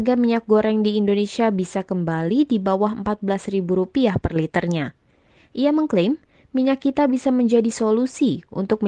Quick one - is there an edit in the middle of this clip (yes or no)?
no